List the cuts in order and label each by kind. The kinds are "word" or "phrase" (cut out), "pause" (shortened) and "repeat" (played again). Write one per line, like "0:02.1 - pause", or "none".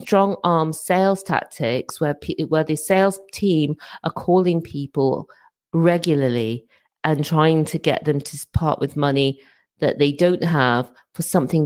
none